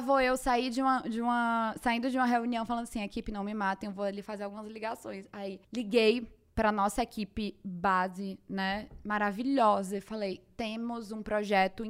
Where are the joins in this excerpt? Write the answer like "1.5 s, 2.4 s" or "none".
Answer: 5.6 s